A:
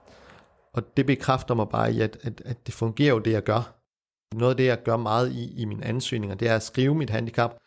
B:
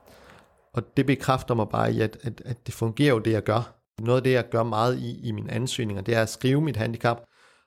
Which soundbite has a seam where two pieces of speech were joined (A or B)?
B